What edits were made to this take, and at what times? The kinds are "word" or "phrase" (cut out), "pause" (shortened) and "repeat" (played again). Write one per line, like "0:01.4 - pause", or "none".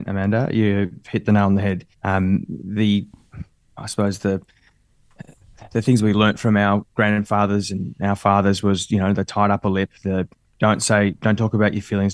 0:01.9 - pause